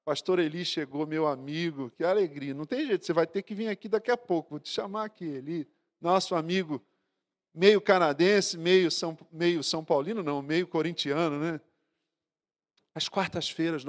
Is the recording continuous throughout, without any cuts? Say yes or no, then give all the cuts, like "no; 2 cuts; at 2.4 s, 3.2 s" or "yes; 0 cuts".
yes; 0 cuts